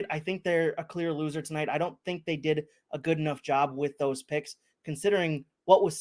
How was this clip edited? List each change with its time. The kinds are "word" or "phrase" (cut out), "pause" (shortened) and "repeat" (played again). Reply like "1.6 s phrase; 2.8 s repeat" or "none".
none